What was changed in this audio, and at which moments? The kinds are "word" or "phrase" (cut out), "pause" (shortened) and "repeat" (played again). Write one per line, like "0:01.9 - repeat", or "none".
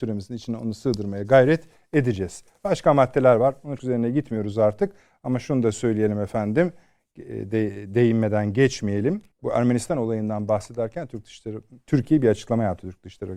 0:03.8 - word
0:09.3 - pause